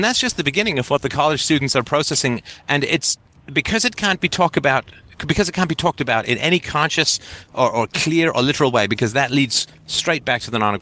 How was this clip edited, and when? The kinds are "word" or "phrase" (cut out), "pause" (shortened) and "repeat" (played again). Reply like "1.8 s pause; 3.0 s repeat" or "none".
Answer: none